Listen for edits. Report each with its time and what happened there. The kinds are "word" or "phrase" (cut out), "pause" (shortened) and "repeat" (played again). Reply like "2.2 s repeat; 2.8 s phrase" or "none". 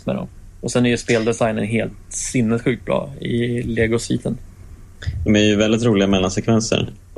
none